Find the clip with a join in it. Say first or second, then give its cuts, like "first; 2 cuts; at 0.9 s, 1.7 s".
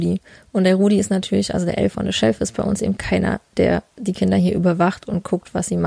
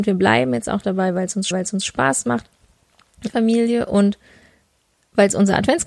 second; 2 cuts; at 1.5 s, 3.3 s